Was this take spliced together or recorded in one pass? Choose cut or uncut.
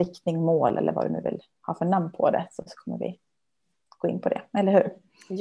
uncut